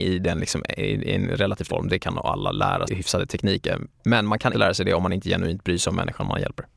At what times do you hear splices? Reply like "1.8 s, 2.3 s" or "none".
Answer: 1.7 s, 2.9 s, 3.9 s, 4.5 s

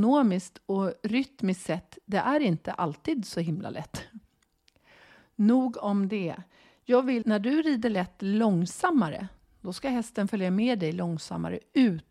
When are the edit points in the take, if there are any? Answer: 7.2 s

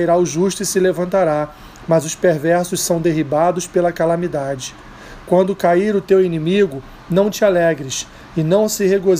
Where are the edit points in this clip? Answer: none

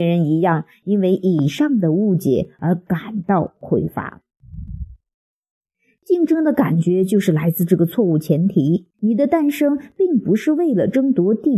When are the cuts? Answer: 8.9 s

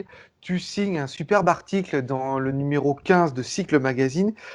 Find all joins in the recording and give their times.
none

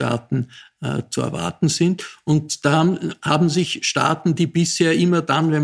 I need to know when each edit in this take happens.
none

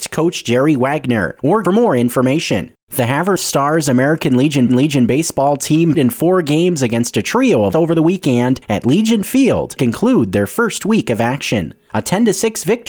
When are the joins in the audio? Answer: 1.6 s, 2.8 s, 3.4 s, 4.7 s, 5.9 s, 7.7 s, 9.8 s

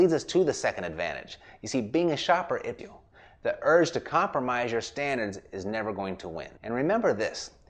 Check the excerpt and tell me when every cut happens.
2.8 s, 6.6 s

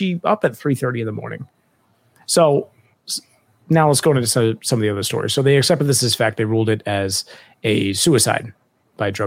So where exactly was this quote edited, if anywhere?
none

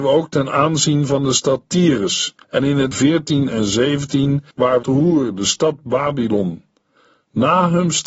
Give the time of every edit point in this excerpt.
2.4 s, 2.9 s, 4.5 s, 4.8 s

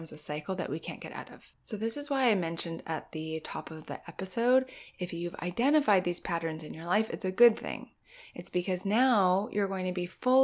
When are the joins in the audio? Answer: 1.5 s

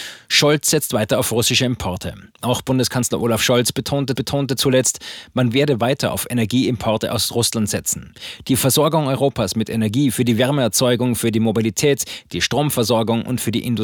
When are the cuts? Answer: 2.3 s, 4.1 s

